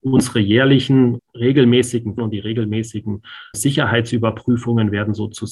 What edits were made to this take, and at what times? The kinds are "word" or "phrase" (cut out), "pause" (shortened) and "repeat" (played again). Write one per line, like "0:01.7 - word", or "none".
0:01.2 - word
0:02.2 - word
0:03.5 - word